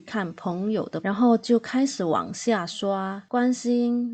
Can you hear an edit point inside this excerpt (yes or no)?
yes